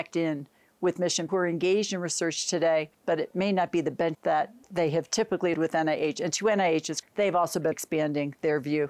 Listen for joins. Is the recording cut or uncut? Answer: cut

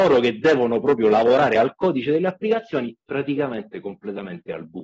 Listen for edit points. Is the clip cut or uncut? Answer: uncut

